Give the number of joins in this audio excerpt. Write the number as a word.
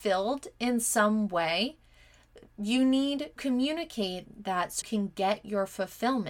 two